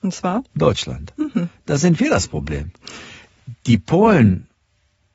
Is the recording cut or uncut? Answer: uncut